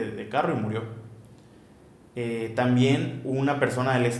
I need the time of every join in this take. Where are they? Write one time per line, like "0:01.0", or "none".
none